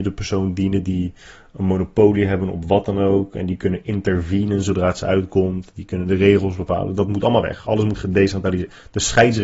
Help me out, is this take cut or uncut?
uncut